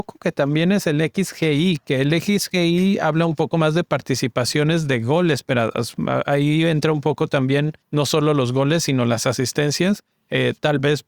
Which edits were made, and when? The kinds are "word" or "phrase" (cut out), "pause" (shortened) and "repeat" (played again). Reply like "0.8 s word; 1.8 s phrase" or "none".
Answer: 7.8 s pause; 10.1 s pause